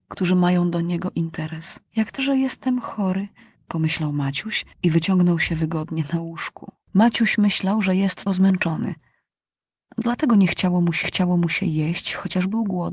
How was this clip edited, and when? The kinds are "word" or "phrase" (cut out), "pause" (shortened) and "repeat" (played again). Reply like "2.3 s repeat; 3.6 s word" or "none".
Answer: 1.9 s pause; 2.2 s word; 3.6 s pause; 4.7 s pause; 6.8 s pause; 8.3 s word; 11.0 s repeat